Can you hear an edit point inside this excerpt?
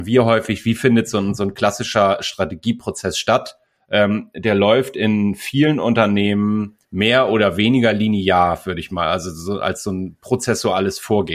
yes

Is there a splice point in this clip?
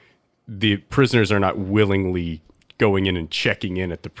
no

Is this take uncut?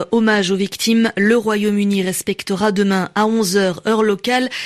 yes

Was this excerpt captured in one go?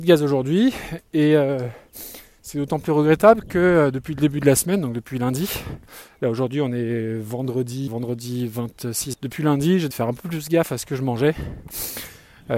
no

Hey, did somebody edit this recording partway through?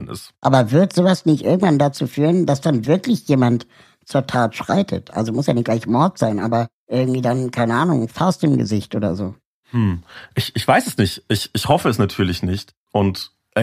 no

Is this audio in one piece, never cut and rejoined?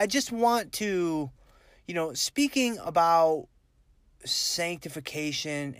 yes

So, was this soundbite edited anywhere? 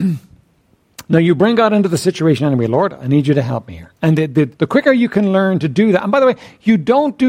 yes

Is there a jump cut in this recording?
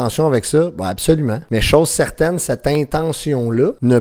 no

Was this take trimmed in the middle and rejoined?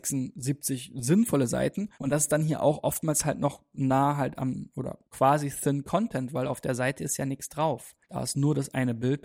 yes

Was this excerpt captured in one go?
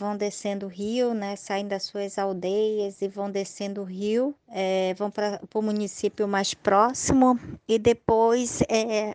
yes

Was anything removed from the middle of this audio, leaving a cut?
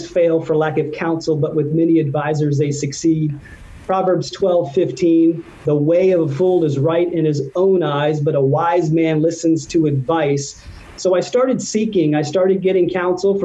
no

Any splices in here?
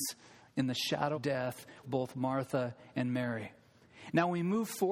yes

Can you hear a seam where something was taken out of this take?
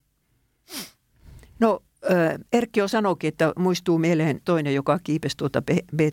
yes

